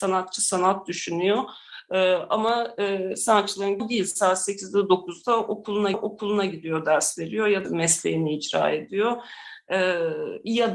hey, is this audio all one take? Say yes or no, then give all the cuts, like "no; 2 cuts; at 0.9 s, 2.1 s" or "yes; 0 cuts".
no; 3 cuts; at 3.8 s, 5.9 s, 7.6 s